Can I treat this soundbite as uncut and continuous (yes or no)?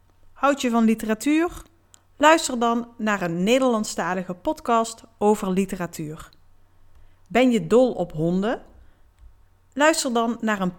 yes